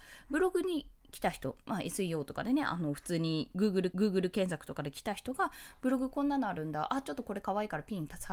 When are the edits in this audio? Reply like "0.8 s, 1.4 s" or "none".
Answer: 1.6 s, 3.9 s